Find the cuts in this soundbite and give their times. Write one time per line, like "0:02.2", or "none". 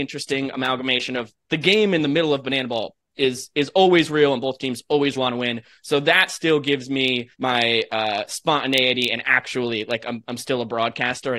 0:05.2
0:07.3

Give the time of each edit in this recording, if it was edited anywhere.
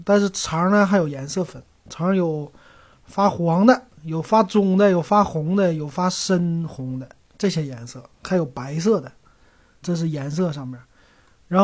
0:07.2
0:09.8

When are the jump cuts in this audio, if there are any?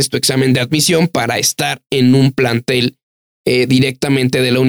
none

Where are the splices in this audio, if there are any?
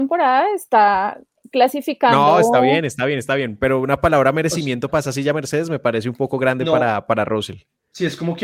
none

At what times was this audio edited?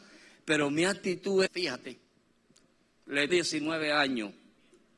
0:01.5
0:03.3

